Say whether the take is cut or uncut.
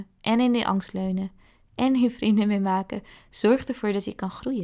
uncut